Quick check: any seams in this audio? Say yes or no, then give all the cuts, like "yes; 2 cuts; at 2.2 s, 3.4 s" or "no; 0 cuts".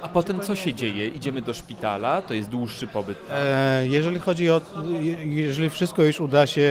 no; 0 cuts